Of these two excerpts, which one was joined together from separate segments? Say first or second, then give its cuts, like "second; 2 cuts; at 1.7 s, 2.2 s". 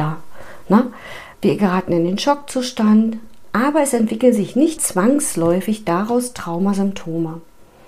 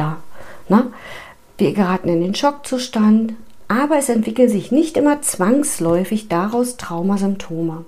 first; 2 cuts; at 1.3 s, 4.8 s